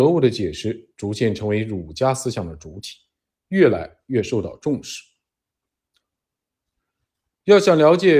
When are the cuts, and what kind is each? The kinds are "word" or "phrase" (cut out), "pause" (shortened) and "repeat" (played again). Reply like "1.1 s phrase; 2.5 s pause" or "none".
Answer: none